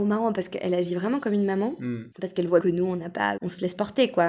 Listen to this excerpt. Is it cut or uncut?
cut